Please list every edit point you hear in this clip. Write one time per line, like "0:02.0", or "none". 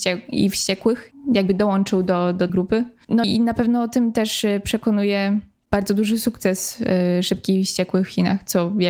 0:02.5
0:03.2